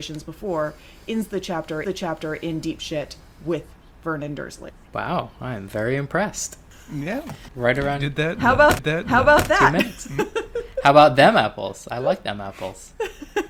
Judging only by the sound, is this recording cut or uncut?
cut